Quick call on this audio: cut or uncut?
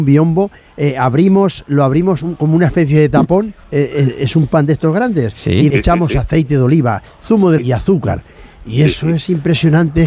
cut